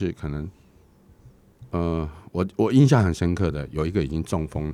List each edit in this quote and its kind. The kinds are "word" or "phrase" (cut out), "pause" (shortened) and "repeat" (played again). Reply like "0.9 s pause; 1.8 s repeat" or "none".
none